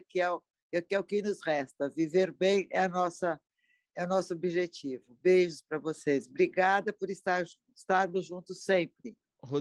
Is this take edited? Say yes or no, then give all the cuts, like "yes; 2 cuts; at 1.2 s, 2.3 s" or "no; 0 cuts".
no; 0 cuts